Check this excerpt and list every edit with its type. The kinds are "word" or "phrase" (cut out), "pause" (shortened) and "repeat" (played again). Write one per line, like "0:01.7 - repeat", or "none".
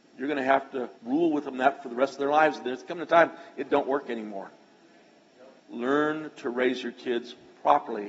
0:01.0 - pause
0:05.6 - pause